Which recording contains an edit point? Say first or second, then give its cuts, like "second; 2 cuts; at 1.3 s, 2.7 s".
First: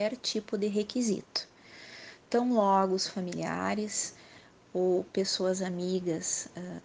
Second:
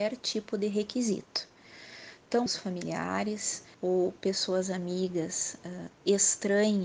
second; 2 cuts; at 2.5 s, 3.7 s